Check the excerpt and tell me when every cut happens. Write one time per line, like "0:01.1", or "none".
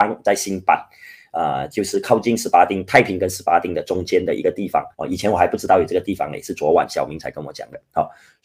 0:04.9